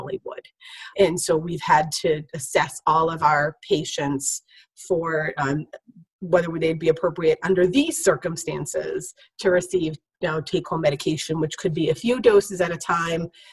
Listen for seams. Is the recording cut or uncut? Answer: cut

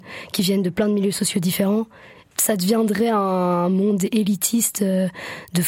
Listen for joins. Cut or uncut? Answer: uncut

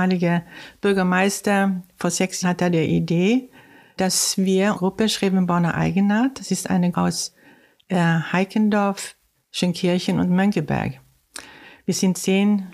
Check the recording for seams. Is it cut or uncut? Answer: cut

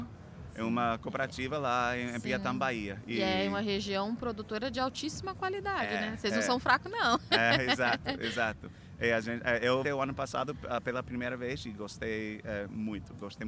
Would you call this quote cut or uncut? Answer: cut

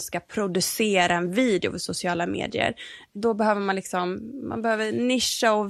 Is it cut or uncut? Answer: uncut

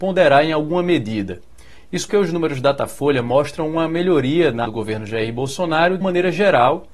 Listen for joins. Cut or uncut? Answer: cut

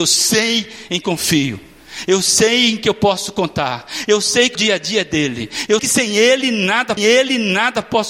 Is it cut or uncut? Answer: cut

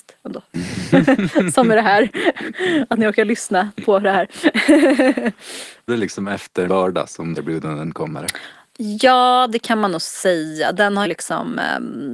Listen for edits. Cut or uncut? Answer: cut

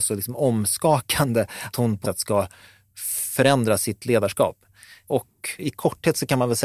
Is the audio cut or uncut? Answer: cut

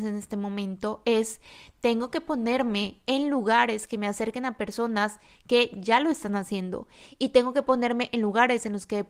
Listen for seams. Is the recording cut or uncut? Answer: uncut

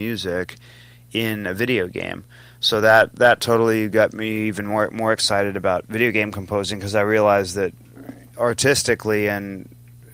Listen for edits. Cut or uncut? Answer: uncut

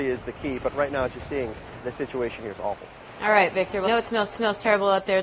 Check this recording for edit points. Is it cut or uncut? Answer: cut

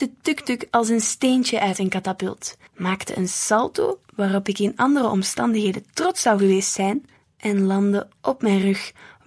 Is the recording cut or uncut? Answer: cut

